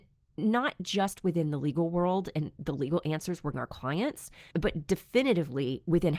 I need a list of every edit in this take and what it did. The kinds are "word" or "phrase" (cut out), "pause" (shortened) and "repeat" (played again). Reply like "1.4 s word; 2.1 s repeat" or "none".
3.5 s word; 4.5 s pause